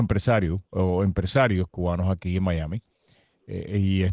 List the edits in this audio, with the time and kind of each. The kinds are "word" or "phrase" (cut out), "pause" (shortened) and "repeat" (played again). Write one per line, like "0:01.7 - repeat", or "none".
none